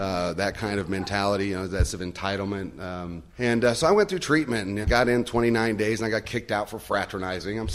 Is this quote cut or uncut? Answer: cut